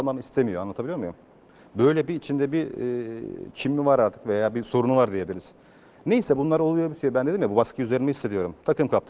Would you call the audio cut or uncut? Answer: uncut